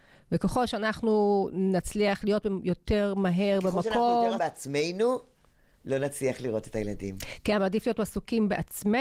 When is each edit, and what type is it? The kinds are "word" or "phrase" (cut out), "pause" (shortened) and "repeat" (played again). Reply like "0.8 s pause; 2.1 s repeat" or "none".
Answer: 4.4 s word